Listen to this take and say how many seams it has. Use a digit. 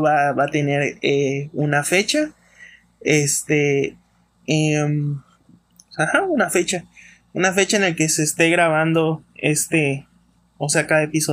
0